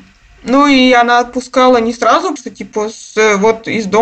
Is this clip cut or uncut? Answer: cut